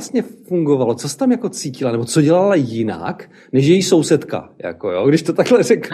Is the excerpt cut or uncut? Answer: uncut